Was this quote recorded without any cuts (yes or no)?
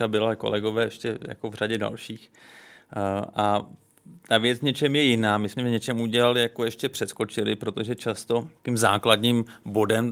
no